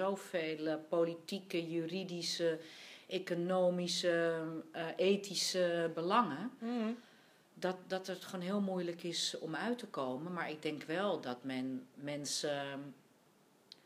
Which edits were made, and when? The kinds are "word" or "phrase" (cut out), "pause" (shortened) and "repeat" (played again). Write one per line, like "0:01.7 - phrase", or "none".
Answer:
none